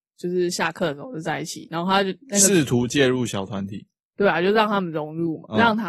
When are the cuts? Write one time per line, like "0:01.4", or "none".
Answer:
none

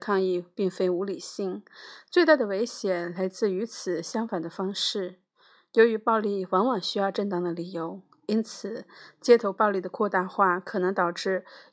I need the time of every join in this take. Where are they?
none

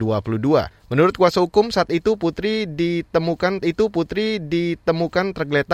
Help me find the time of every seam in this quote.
0:03.6

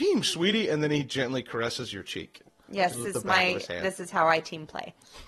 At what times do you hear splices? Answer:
0:02.9

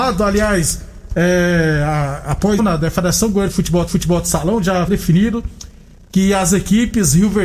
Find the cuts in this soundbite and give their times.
0:02.6
0:03.9
0:04.9

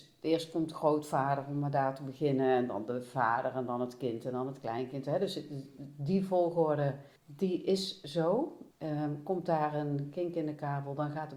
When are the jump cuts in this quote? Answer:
0:07.2
0:08.7

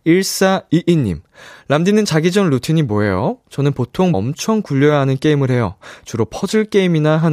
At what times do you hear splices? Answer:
0:04.1

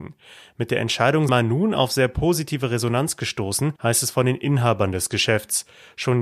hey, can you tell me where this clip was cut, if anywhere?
0:01.3
0:03.8

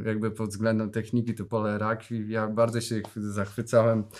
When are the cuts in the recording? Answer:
0:01.5

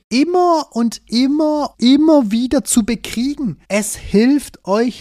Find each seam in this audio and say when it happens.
0:01.7
0:03.6

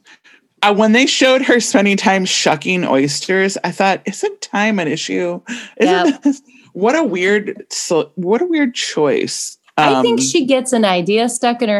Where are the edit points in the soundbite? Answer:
none

